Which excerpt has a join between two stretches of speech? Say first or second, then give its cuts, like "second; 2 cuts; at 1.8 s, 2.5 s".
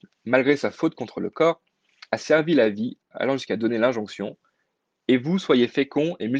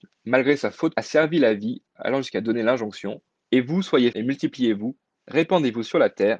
second; 3 cuts; at 0.9 s, 3.3 s, 4.1 s